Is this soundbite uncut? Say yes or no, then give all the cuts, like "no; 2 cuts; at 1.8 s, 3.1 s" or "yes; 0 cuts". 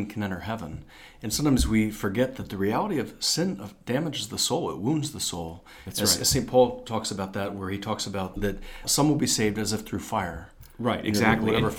no; 1 cut; at 8.4 s